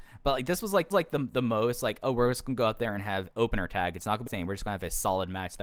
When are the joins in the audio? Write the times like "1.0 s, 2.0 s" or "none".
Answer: 0.9 s, 3.3 s, 4.3 s